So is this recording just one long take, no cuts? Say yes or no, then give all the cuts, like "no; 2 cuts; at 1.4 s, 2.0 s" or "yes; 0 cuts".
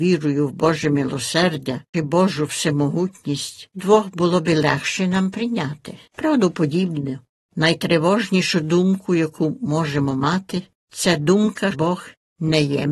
no; 4 cuts; at 1.9 s, 3.7 s, 6.1 s, 11.7 s